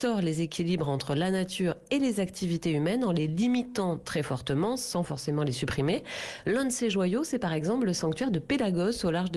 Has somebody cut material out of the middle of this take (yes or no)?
no